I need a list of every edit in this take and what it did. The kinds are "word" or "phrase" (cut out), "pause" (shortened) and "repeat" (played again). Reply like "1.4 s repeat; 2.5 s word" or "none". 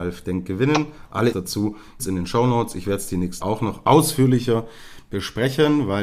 1.3 s word; 2.0 s word; 3.4 s word